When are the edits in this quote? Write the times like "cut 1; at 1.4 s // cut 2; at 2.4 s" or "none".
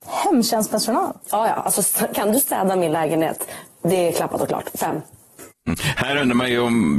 cut 1; at 1.2 s // cut 2; at 3.7 s